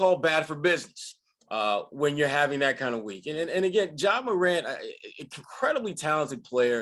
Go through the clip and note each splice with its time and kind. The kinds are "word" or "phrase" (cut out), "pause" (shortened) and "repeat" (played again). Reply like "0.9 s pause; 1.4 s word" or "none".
none